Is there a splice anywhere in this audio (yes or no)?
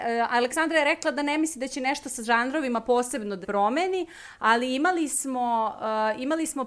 yes